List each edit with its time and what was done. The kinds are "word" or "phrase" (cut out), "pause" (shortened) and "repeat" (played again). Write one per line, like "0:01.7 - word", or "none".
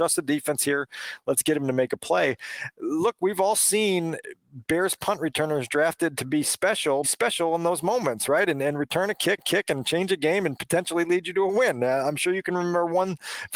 0:07.0 - word
0:09.4 - repeat